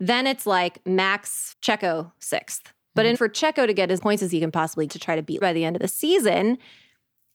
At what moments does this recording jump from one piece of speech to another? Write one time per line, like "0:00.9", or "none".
0:01.5
0:03.1
0:04.0
0:04.9
0:05.4